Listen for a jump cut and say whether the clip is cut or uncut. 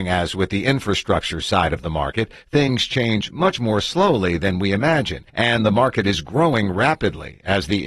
cut